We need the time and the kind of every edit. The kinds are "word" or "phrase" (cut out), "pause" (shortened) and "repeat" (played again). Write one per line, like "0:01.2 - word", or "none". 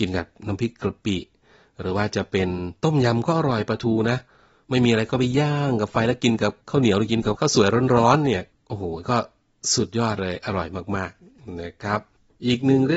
none